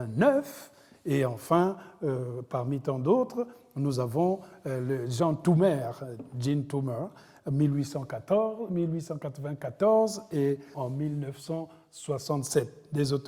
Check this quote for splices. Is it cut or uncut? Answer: cut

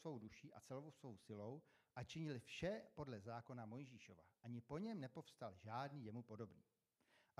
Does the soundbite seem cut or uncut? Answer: uncut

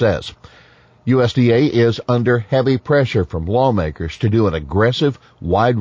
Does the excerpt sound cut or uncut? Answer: uncut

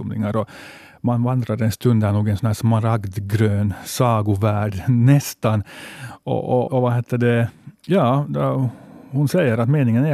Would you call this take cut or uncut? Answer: cut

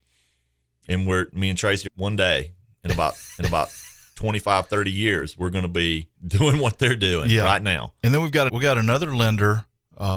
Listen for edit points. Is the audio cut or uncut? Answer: cut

